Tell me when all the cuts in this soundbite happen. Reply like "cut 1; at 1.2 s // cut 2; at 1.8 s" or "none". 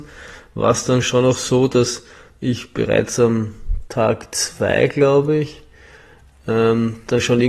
none